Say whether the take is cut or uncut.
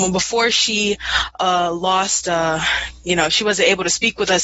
uncut